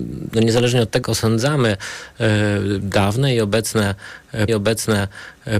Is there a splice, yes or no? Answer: yes